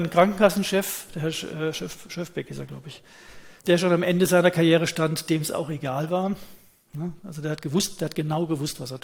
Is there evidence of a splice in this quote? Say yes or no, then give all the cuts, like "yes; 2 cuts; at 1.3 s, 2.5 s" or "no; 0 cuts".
yes; 1 cut; at 3.6 s